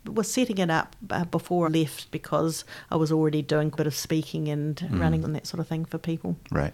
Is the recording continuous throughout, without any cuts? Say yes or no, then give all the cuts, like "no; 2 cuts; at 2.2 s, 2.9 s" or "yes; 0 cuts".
no; 4 cuts; at 1.6 s, 2.1 s, 3.7 s, 5.2 s